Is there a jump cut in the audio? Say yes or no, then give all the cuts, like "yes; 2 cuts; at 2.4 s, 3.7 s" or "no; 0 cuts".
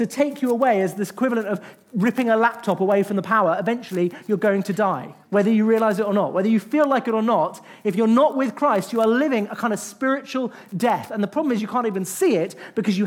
yes; 1 cut; at 5.2 s